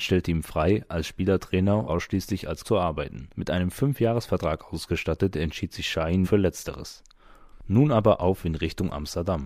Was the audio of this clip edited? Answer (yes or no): yes